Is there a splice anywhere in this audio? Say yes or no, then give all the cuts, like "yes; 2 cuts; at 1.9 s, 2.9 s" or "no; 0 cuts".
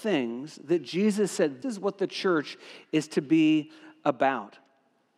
yes; 1 cut; at 1.6 s